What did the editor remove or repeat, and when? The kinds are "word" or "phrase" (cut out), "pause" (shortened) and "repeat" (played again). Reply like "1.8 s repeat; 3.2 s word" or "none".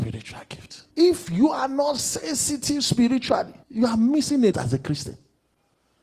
0.9 s pause; 3.6 s pause; 4.5 s word